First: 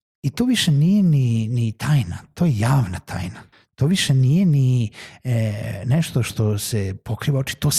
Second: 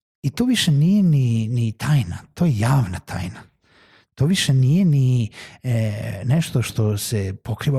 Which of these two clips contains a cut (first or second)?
first